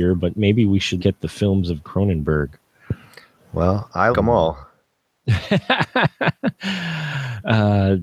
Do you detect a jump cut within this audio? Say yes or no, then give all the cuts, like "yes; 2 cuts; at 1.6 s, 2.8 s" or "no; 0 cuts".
yes; 3 cuts; at 1.0 s, 1.8 s, 4.1 s